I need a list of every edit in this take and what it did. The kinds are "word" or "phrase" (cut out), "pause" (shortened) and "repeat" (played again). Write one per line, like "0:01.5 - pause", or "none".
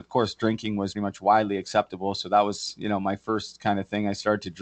0:00.9 - word